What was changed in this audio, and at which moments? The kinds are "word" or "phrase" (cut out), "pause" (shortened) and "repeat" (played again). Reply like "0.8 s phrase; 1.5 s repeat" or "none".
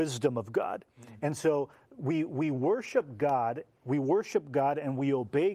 none